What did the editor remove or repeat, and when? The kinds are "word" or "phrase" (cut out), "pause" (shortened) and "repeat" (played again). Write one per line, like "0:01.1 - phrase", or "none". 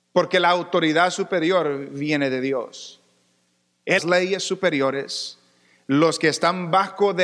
0:04.0 - phrase